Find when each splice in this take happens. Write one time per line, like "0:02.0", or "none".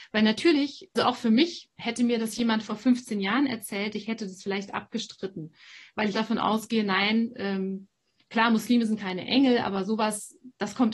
0:00.9
0:06.1